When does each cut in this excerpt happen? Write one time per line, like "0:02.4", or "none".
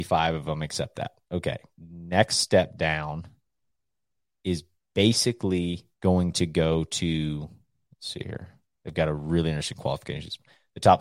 0:05.9